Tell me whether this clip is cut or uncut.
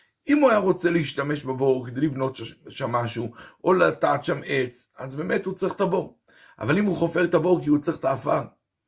uncut